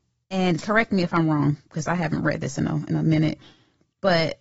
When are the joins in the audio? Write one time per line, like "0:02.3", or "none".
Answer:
none